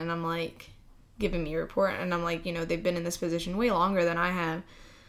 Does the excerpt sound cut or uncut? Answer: uncut